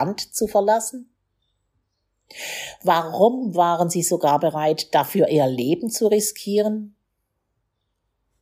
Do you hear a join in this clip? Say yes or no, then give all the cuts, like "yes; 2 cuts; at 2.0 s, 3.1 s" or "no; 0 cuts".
no; 0 cuts